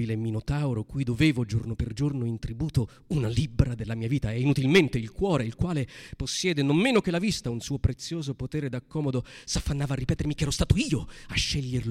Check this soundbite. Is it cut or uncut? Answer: uncut